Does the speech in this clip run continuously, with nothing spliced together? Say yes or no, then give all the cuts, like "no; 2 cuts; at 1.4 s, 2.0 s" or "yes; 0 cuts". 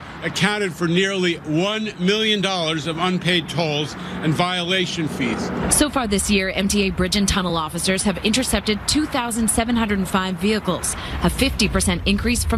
yes; 0 cuts